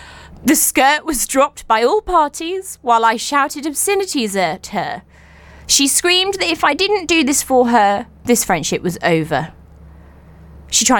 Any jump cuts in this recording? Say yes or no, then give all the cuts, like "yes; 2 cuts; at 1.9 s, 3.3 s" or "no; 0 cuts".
no; 0 cuts